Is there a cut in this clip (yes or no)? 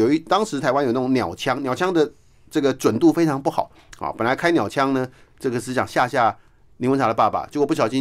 no